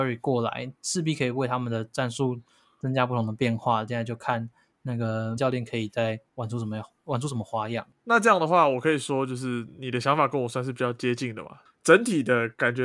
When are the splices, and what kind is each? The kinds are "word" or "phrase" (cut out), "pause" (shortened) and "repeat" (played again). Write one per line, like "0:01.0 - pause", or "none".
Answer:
0:05.4 - word